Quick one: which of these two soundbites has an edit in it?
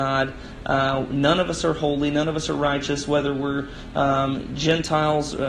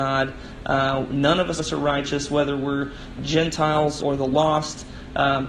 second; 3 cuts; at 1.6 s, 3.2 s, 4.0 s

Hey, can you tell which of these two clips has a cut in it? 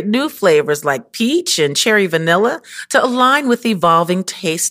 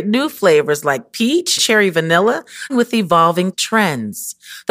second; 3 cuts; at 1.6 s, 2.7 s, 3.5 s

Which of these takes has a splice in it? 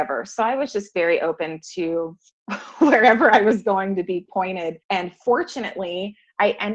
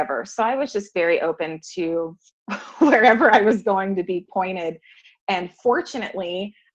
first; 1 cut; at 4.8 s

